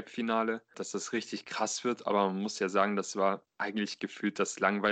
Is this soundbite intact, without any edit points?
no; 1 cut; at 3.5 s

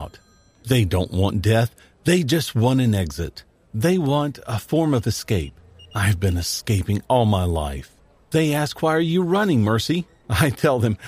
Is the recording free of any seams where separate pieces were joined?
yes; 0 cuts

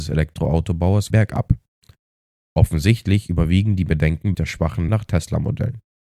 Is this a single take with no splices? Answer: no; 3 cuts; at 1.1 s, 4.3 s, 4.9 s

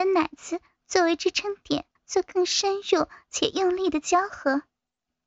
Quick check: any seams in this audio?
yes; 1 cut; at 2.0 s

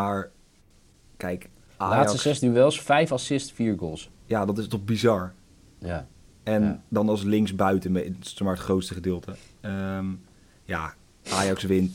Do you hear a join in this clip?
no; 0 cuts

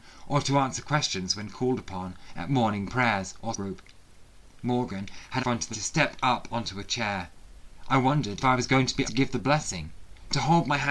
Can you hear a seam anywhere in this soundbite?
yes; 5 cuts; at 3.5 s, 5.4 s, 5.7 s, 8.4 s, 9.0 s

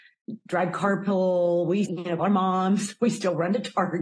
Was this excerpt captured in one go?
no; 2 cuts; at 1.8 s, 2.2 s

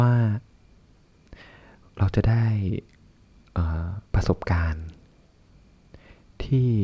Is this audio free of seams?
no; 1 cut; at 4.1 s

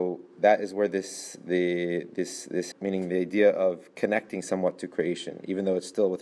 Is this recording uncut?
no; 1 cut; at 2.7 s

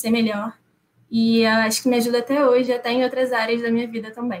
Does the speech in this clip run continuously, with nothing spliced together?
yes; 0 cuts

